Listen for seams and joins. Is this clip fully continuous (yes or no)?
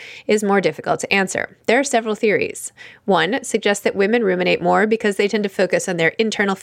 yes